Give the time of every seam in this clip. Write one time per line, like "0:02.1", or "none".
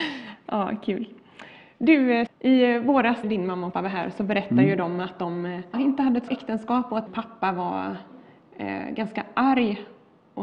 0:02.3
0:03.2
0:03.7
0:05.7
0:06.3
0:07.1